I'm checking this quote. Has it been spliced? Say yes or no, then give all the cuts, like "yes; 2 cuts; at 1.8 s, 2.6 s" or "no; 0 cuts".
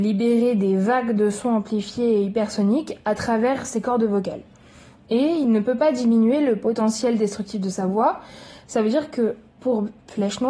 no; 0 cuts